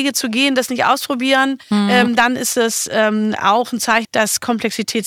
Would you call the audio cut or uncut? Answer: cut